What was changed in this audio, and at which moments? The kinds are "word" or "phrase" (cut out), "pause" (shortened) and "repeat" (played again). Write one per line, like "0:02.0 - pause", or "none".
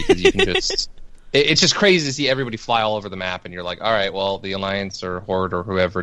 none